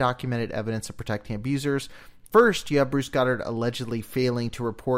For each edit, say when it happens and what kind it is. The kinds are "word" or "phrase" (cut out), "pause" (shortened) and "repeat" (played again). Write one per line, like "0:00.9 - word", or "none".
none